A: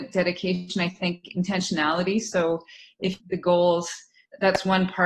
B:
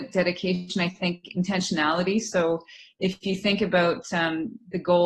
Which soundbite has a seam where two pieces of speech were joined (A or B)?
A